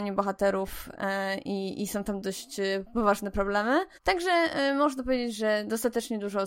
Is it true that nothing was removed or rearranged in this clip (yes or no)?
no